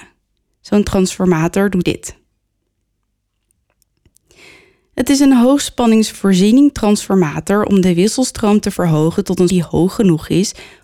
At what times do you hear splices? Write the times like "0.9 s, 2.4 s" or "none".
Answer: 1.8 s, 9.5 s